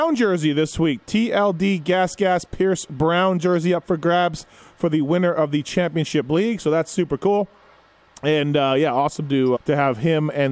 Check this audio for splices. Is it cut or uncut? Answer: cut